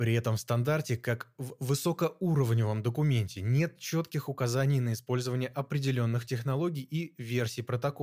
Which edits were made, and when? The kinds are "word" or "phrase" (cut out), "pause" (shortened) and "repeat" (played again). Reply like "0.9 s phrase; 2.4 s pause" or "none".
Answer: none